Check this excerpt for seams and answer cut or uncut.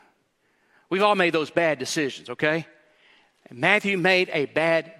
uncut